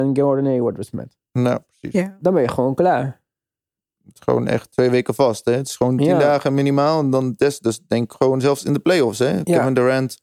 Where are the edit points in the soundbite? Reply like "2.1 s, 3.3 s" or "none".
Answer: none